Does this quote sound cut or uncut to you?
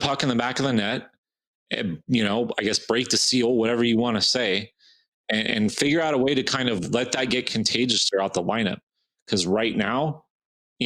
uncut